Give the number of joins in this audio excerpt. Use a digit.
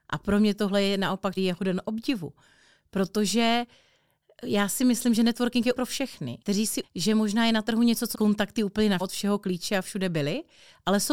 6